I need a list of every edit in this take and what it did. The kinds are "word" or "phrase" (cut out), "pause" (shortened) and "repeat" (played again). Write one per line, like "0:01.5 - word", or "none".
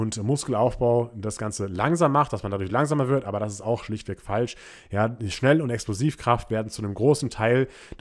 none